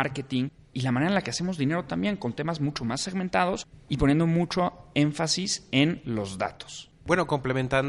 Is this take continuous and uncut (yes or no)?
yes